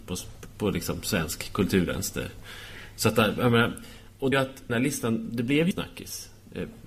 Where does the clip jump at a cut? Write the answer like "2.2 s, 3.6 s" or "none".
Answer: 4.3 s, 4.7 s, 5.7 s